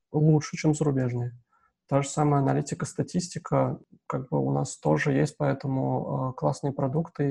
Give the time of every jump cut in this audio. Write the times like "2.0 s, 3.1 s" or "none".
none